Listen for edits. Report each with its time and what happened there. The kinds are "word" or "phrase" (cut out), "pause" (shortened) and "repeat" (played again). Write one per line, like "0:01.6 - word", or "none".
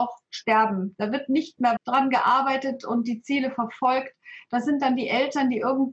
0:01.8 - word